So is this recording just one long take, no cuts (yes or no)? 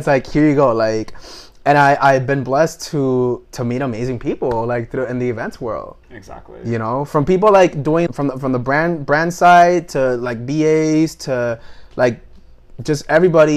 no